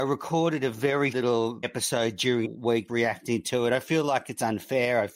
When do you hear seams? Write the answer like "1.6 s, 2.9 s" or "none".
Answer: 1.1 s, 1.6 s, 2.4 s, 2.9 s